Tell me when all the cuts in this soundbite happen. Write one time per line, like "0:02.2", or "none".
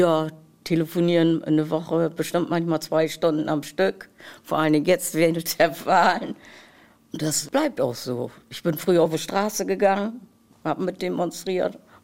none

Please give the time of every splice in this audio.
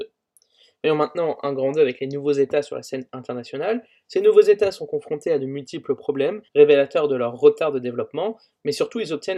0:06.5

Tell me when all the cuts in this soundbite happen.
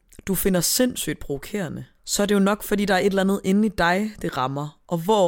0:01.9

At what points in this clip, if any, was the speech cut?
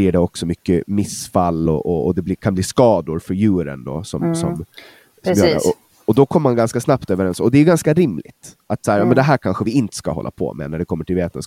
none

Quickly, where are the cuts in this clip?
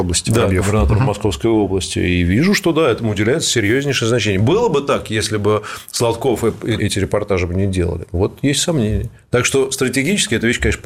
0:06.8

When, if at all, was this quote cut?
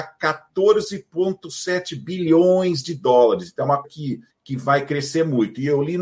0:03.8
0:04.3

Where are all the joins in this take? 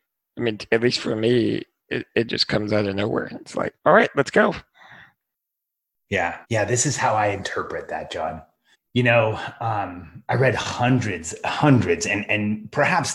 0:03.8
0:06.4
0:08.7
0:12.3

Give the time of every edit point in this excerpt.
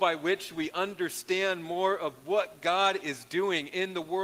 none

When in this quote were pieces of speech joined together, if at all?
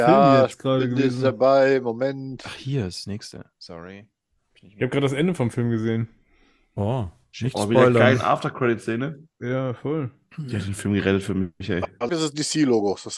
0:12.1

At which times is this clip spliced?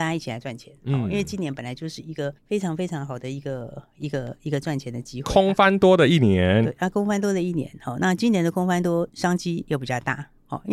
0:02.4

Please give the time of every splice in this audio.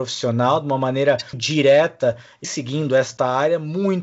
0:01.3
0:02.4

